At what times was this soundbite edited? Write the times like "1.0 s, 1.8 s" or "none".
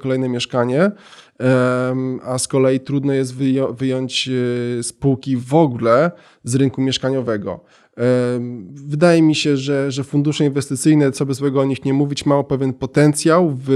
none